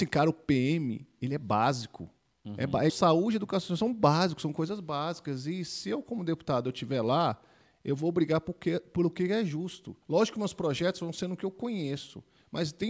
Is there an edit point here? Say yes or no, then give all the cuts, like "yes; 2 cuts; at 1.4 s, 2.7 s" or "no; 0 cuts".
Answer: yes; 3 cuts; at 2.3 s, 2.9 s, 10.0 s